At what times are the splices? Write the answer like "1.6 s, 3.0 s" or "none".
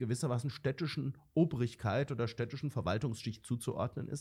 none